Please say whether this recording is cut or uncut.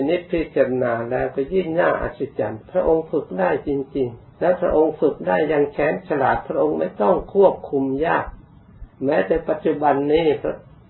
cut